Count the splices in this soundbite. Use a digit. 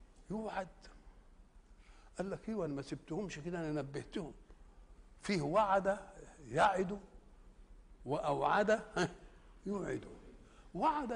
0